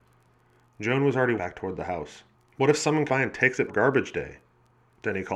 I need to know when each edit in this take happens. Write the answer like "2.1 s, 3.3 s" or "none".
1.4 s, 2.3 s, 3.1 s, 3.7 s

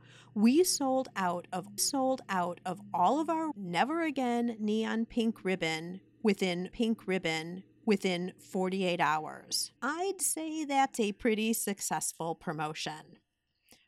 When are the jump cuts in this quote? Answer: 1.8 s, 3.5 s, 6.7 s, 9.8 s

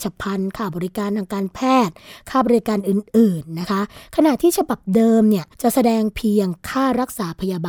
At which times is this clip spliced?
5.5 s

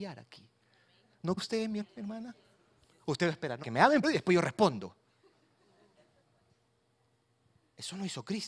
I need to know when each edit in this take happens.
1.4 s, 1.8 s, 3.6 s, 4.0 s

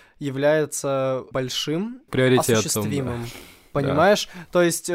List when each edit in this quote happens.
1.3 s, 2.1 s

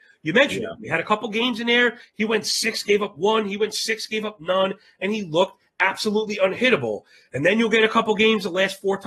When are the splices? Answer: none

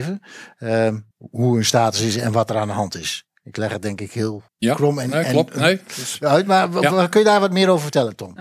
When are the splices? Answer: 1.1 s, 4.5 s

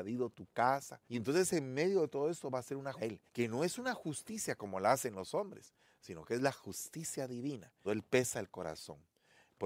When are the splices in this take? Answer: 1.1 s, 3.0 s, 3.3 s, 7.8 s

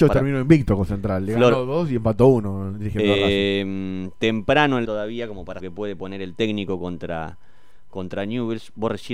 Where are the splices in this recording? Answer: 4.9 s, 5.6 s

